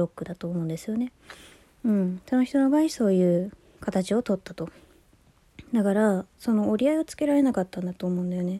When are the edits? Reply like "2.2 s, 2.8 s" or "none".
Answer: none